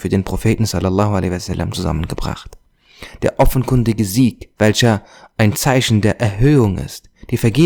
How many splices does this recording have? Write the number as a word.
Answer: one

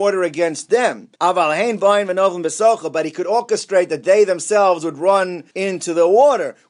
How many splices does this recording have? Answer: two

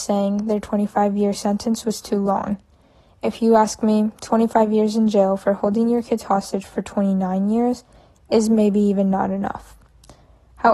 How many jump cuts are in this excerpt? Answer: zero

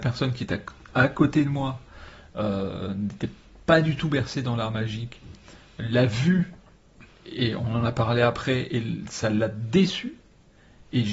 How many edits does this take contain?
zero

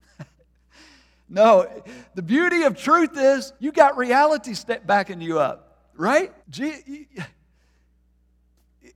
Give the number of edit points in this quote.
two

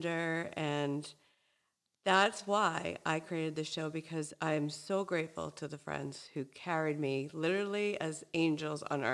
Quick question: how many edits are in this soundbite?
zero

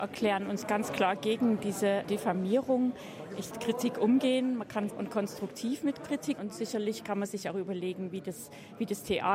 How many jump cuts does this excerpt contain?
four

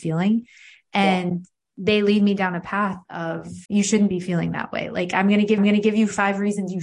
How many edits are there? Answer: two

